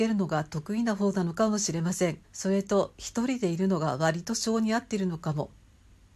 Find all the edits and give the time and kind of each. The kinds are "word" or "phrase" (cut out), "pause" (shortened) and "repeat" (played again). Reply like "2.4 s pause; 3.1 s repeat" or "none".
2.2 s pause